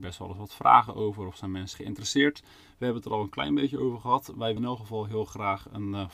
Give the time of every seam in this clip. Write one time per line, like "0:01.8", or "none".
0:01.7
0:04.6